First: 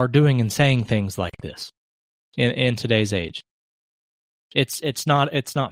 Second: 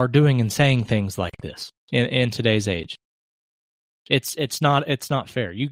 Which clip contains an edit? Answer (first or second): second